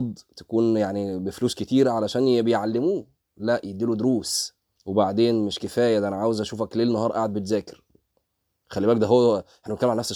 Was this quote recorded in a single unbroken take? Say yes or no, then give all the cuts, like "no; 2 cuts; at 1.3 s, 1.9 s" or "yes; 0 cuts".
no; 1 cut; at 4.8 s